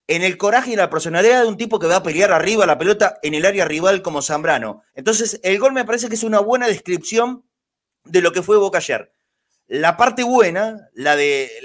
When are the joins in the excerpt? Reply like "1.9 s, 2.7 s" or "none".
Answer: 4.9 s